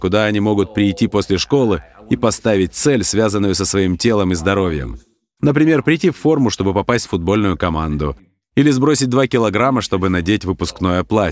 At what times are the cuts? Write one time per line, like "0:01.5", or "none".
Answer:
none